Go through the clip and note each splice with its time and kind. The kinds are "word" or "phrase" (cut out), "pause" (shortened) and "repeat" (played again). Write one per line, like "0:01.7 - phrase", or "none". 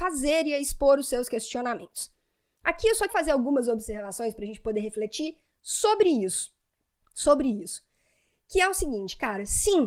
0:03.1 - word